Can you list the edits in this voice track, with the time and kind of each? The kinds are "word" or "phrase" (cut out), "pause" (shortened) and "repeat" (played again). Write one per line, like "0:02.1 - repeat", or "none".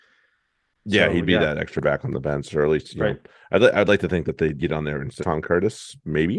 0:04.6 - word
0:05.2 - word